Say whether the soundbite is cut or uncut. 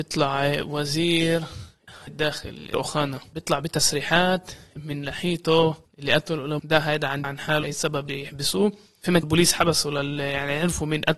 cut